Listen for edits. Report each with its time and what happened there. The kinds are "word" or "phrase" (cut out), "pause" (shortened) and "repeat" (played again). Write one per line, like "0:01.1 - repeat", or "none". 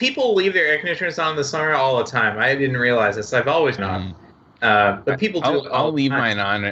0:03.8 - phrase